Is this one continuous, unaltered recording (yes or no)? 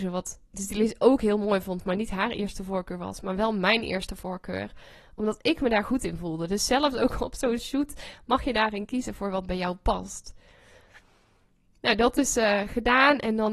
yes